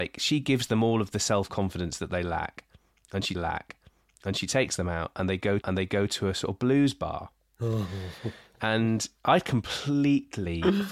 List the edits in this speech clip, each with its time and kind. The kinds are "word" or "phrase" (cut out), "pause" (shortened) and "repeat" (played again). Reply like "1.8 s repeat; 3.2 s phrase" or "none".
3.3 s repeat; 5.6 s repeat